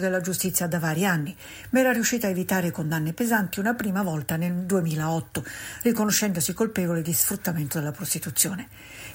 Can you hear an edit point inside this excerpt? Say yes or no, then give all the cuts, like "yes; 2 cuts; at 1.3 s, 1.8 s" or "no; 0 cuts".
no; 0 cuts